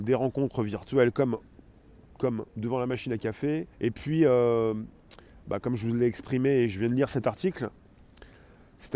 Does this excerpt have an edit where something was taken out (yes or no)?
yes